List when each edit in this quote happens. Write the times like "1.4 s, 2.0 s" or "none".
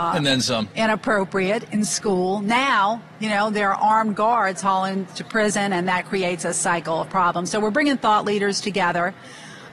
5.1 s

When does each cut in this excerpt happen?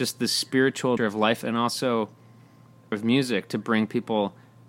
1.0 s, 1.4 s, 2.9 s

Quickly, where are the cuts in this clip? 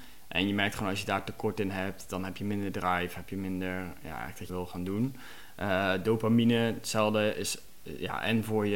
4.5 s

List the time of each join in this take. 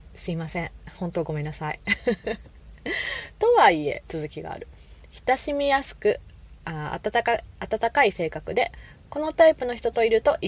4.1 s

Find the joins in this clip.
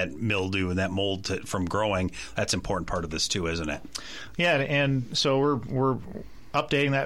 none

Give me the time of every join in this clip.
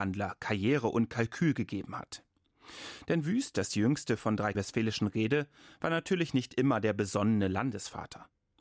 4.5 s

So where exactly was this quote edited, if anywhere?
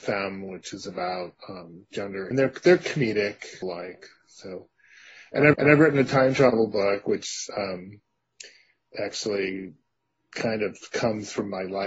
1.4 s, 2.3 s, 3.6 s, 5.5 s

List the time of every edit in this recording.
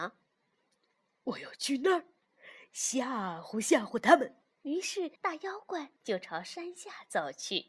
1.2 s, 4.5 s, 5.2 s, 6.0 s

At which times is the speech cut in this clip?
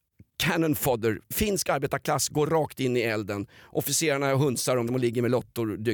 4.9 s

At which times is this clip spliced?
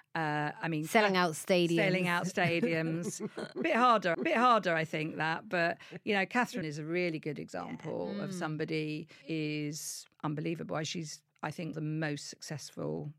4.1 s, 6.6 s, 9.2 s, 10.1 s, 11.7 s

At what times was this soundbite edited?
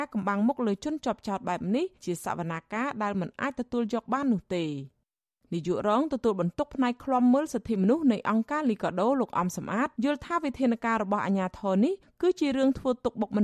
2.0 s, 9.9 s

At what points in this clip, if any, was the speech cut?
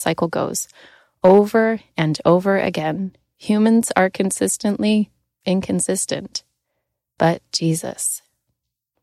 none

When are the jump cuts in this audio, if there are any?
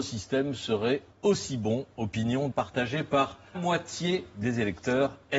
1.1 s, 2.5 s, 3.5 s

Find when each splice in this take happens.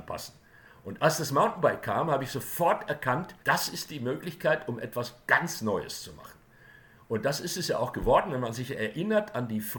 3.4 s

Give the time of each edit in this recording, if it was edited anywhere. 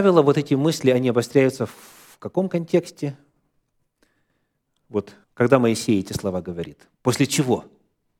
5.2 s, 6.9 s

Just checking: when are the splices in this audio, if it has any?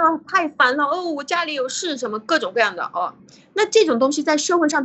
none

